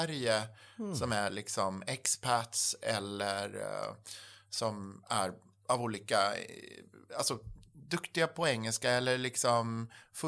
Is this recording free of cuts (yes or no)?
yes